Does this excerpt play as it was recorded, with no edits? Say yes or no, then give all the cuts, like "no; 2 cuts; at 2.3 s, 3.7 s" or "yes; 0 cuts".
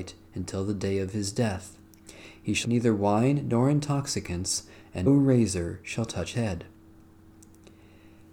no; 3 cuts; at 2.6 s, 5.1 s, 6.3 s